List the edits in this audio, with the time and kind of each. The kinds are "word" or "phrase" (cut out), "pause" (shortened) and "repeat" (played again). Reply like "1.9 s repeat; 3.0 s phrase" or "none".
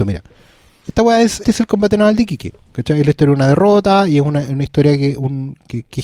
1.4 s word